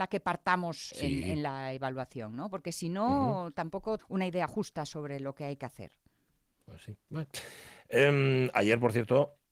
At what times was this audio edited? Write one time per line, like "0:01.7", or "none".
0:00.9
0:04.0